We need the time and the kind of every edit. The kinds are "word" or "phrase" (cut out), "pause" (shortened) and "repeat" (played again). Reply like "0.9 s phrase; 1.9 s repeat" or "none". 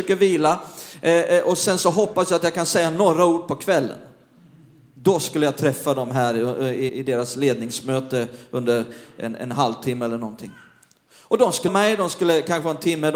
6.9 s word; 11.7 s word